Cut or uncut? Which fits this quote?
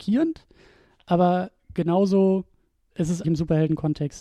cut